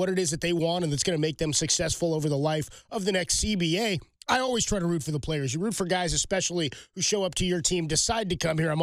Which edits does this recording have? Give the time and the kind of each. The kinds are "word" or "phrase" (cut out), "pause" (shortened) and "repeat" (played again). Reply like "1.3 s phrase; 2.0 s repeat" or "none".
none